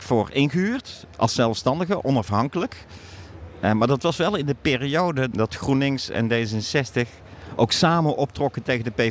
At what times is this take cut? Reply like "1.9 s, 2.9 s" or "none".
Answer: 5.3 s